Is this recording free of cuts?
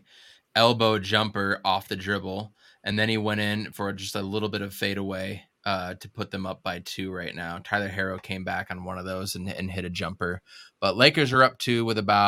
yes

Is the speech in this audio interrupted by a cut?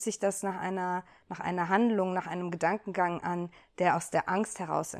no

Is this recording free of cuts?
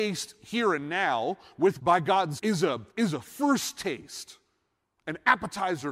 no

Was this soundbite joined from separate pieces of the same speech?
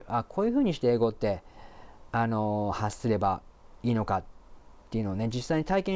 no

